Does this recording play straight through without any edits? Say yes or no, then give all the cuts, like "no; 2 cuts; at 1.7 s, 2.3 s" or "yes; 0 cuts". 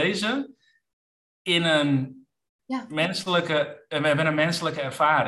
yes; 0 cuts